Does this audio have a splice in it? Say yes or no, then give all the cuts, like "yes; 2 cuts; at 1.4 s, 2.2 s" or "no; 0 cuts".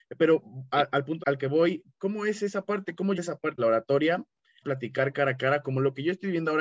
yes; 5 cuts; at 1.2 s, 1.9 s, 3.1 s, 3.6 s, 4.6 s